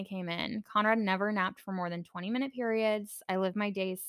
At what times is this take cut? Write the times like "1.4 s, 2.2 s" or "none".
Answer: none